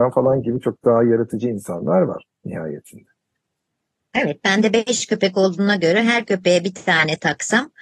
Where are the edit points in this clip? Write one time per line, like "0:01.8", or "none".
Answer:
0:02.3